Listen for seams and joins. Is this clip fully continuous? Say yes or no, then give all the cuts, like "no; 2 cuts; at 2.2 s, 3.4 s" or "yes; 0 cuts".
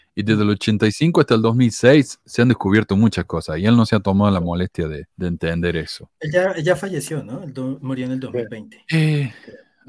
no; 1 cut; at 5.1 s